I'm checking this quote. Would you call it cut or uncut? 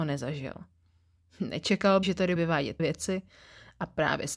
cut